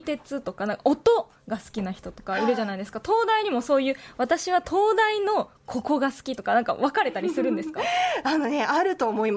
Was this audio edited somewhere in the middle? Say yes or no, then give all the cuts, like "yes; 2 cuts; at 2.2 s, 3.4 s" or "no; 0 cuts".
no; 0 cuts